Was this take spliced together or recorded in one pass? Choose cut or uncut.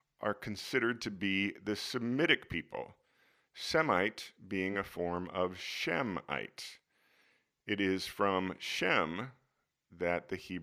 uncut